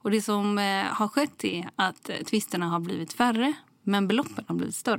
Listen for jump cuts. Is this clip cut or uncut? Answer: uncut